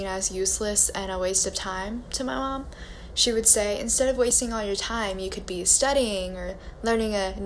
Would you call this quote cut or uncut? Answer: uncut